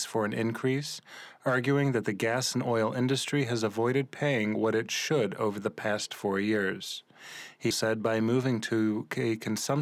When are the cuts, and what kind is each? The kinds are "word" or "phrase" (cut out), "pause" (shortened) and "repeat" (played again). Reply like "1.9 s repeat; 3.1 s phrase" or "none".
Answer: 7.7 s word